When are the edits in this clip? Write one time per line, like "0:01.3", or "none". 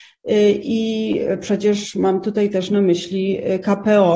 none